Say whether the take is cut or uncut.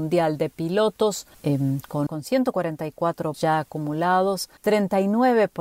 cut